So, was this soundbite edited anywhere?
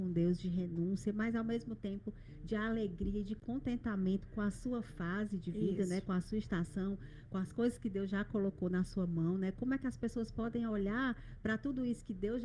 no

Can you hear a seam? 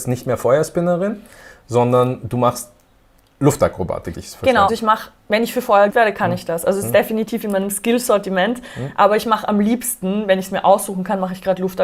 yes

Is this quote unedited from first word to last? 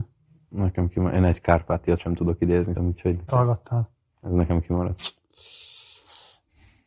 no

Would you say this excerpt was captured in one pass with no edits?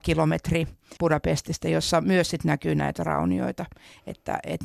no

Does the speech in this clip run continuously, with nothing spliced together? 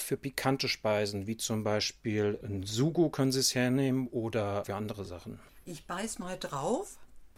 yes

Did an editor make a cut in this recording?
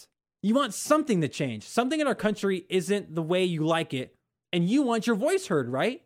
no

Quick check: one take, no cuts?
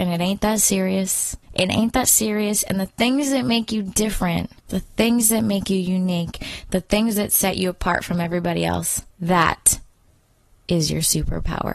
no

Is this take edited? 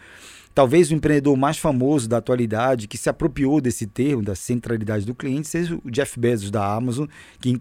no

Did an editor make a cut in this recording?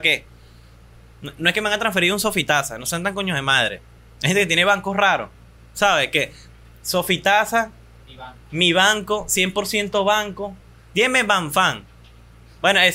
no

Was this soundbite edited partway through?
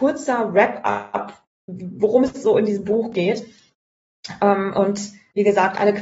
yes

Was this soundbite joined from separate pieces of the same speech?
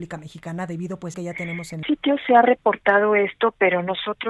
yes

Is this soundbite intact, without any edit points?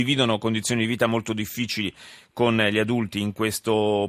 yes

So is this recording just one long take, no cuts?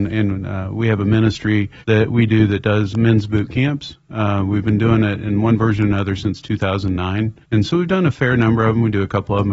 no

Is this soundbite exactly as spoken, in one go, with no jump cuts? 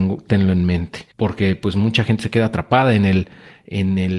no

